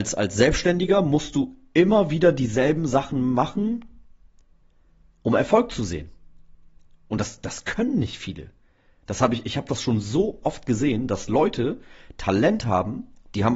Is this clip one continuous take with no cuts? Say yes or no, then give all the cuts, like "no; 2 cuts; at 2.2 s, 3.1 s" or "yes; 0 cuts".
yes; 0 cuts